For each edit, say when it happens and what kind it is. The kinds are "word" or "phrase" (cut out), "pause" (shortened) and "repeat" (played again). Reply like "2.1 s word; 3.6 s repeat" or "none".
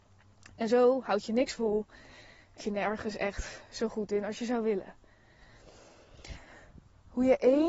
2.6 s word